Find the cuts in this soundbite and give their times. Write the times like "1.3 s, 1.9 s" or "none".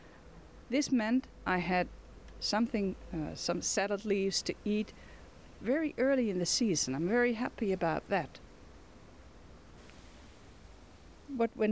none

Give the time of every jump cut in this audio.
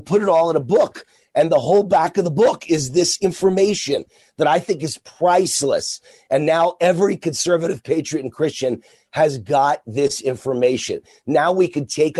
none

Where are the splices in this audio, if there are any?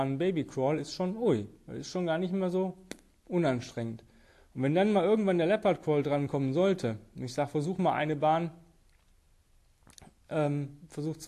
none

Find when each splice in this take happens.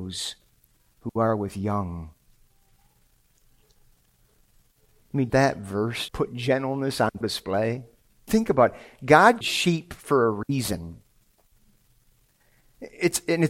5.3 s, 6.1 s, 7.2 s, 8.3 s, 9.4 s

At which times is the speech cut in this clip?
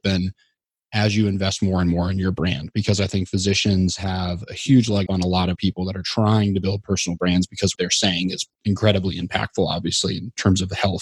5.1 s, 5.5 s, 7.7 s, 8.5 s

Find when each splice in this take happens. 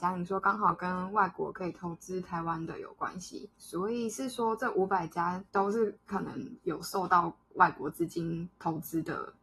3.5 s, 5.5 s

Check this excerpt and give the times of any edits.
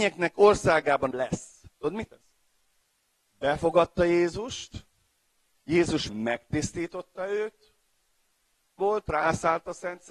1.1 s, 2.1 s, 6.1 s, 8.8 s

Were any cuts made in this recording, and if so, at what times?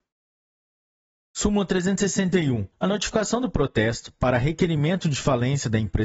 2.7 s

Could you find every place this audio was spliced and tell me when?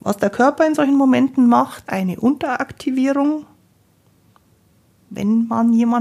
1.9 s

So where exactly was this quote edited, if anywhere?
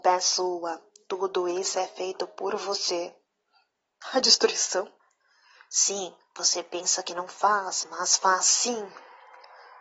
none

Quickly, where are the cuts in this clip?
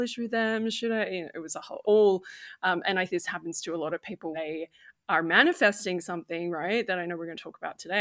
1.8 s, 3.1 s, 4.3 s

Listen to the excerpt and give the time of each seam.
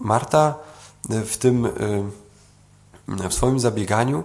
3.3 s

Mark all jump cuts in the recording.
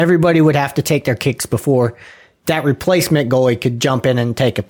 none

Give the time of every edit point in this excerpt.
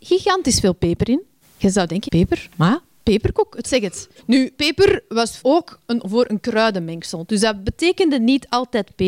1.4 s, 2.1 s, 3.6 s, 4.2 s, 5.4 s, 6.0 s

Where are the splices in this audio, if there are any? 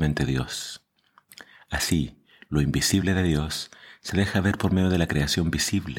none

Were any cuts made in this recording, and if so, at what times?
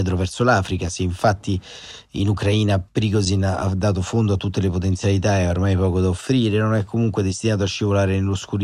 2.9 s

